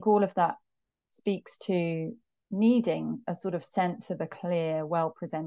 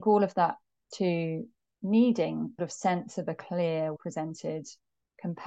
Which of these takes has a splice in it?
second; 3 cuts; at 0.9 s, 2.6 s, 4.0 s

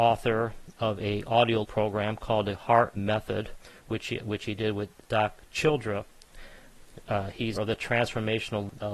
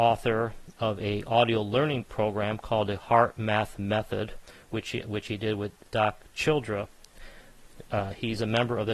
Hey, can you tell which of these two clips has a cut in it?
first; 3 cuts; at 1.6 s, 2.9 s, 7.6 s

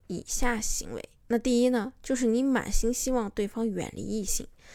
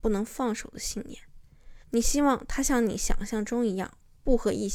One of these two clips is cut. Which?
second; 1 cut; at 1.8 s

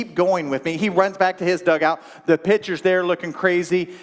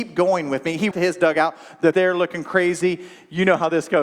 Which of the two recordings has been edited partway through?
second; 2 cuts; at 0.9 s, 1.9 s

